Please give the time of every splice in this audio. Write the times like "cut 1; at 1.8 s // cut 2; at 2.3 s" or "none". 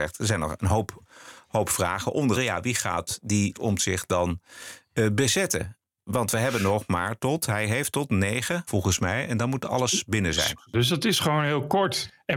cut 1; at 2.3 s // cut 2; at 3.5 s // cut 3; at 8.7 s // cut 4; at 10.7 s